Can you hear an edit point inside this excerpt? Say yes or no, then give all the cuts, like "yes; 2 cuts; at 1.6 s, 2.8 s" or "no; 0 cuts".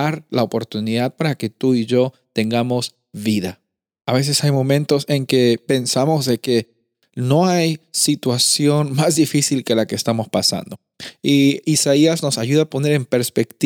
no; 0 cuts